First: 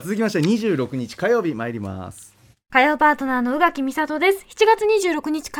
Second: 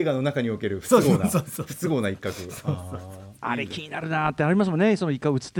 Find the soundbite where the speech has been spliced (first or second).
first